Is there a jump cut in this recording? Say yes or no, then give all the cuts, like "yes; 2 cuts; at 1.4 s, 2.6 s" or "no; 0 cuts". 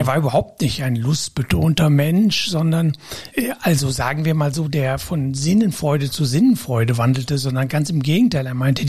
no; 0 cuts